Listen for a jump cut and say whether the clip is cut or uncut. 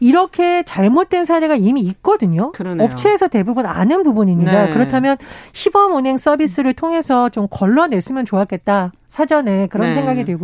uncut